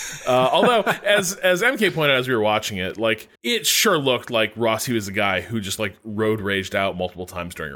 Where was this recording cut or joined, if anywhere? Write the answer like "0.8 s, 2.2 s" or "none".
3.3 s

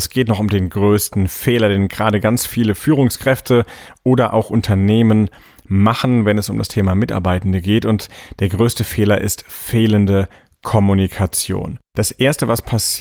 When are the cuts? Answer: none

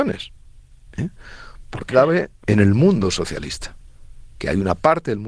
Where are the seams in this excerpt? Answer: 1.9 s, 2.4 s

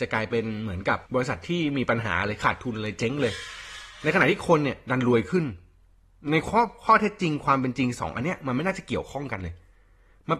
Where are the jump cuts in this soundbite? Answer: 1.1 s

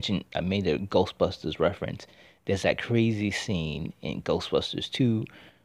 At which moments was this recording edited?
none

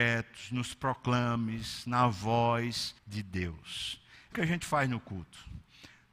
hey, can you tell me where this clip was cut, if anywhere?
3.0 s, 4.3 s

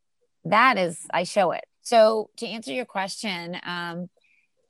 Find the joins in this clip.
1.7 s

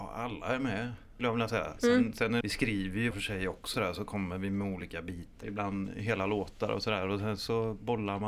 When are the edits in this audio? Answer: 1.2 s, 2.4 s, 3.1 s, 3.7 s, 5.4 s

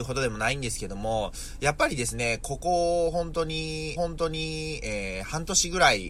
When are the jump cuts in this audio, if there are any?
4.0 s

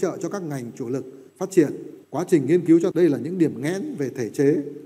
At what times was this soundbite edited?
1.3 s, 2.0 s, 2.9 s

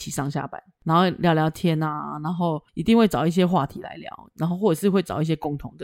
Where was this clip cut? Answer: 2.7 s

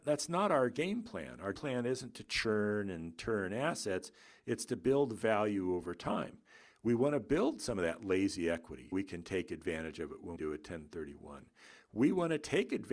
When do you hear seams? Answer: 1.5 s, 8.9 s, 10.4 s

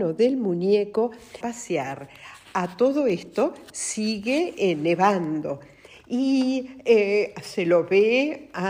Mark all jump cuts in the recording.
1.4 s

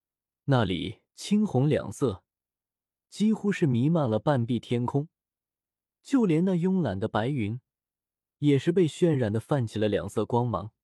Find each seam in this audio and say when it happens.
1.1 s

